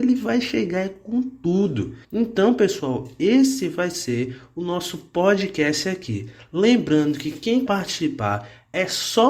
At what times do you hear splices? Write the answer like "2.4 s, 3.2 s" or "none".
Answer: 2.0 s, 7.7 s